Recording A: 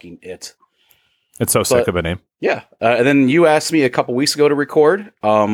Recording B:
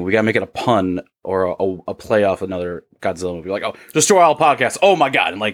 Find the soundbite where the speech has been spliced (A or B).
A